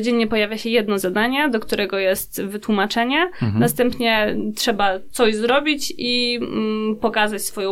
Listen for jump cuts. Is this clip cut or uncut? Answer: uncut